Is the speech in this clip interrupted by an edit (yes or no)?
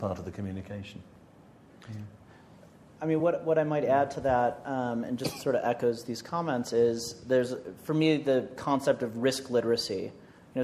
no